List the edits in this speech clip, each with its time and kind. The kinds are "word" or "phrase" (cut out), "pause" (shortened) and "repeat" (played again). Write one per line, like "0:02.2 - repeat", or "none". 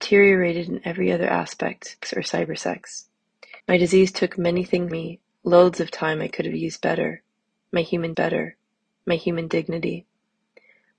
0:02.0 - phrase
0:03.6 - pause
0:04.9 - word
0:08.1 - repeat